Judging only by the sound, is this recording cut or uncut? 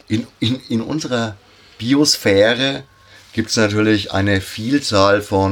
uncut